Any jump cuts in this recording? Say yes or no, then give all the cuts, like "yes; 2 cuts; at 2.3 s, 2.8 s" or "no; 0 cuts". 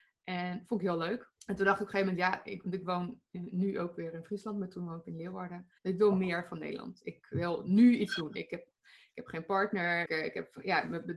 yes; 3 cuts; at 1.4 s, 5.8 s, 10.1 s